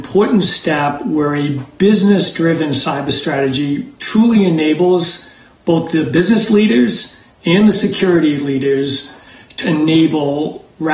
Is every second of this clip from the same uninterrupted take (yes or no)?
no